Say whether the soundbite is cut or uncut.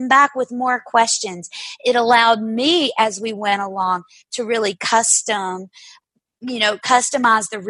uncut